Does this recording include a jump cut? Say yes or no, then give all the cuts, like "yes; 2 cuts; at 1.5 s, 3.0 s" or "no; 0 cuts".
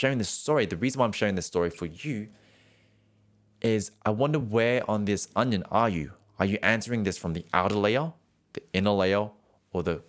no; 0 cuts